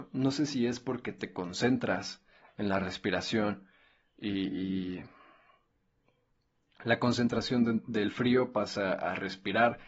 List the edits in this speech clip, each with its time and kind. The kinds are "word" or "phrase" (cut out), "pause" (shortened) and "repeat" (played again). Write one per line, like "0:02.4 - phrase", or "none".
none